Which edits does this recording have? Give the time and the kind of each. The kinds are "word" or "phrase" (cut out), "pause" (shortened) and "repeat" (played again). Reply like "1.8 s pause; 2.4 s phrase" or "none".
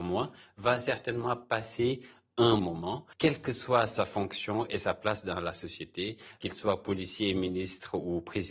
2.6 s word; 3.1 s pause